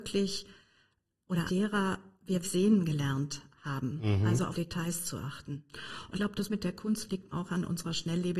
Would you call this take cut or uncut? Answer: cut